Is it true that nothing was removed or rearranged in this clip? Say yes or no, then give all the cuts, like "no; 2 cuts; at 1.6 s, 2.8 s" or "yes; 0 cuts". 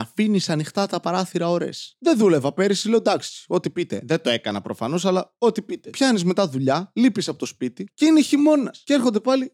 yes; 0 cuts